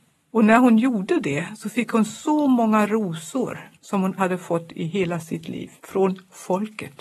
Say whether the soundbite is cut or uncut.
cut